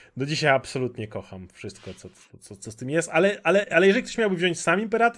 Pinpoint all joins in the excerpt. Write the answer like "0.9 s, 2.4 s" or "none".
none

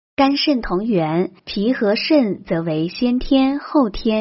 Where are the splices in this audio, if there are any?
1.4 s

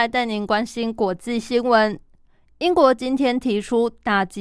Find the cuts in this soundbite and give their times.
none

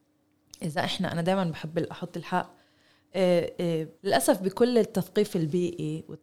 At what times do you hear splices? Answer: 4.0 s

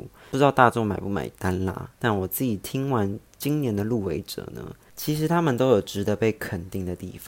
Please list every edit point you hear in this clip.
1.9 s, 3.3 s

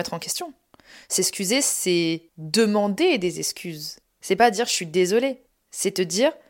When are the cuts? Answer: 2.3 s, 4.0 s, 5.5 s

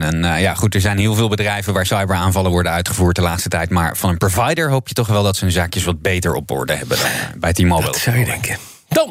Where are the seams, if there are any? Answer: none

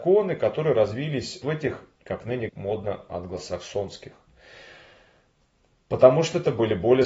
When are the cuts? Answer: 1.4 s, 1.9 s, 2.5 s

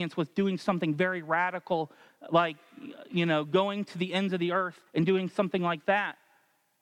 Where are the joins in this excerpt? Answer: 4.9 s

